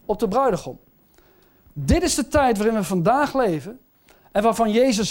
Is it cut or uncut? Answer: uncut